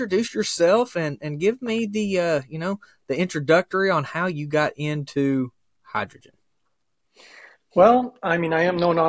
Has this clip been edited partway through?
no; 0 cuts

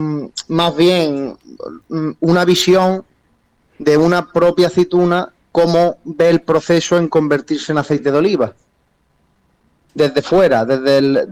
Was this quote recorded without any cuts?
yes; 0 cuts

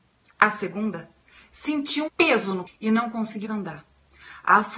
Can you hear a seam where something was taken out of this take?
yes; 3 cuts; at 2.1 s, 2.7 s, 3.4 s

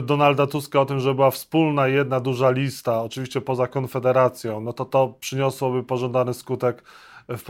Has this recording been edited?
no; 0 cuts

